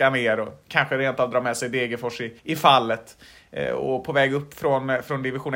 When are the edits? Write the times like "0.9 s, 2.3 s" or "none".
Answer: 2.4 s